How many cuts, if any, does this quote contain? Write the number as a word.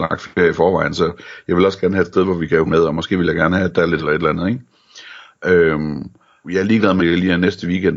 four